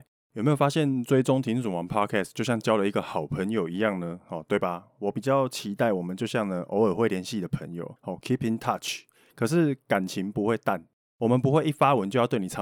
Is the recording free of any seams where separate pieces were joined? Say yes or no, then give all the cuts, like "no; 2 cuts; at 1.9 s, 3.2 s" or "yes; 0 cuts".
no; 1 cut; at 8.0 s